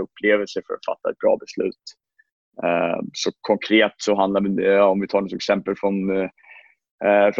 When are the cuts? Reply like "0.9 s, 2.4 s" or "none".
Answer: none